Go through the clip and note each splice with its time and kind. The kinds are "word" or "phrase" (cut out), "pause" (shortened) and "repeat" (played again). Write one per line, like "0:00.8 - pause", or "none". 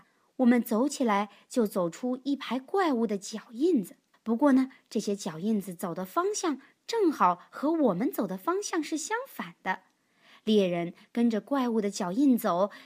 0:04.1 - pause